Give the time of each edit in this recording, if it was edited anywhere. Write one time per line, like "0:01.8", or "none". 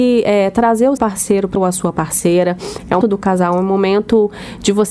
0:01.0
0:01.6
0:03.0